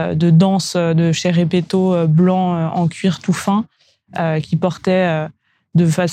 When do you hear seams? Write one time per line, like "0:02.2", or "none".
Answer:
none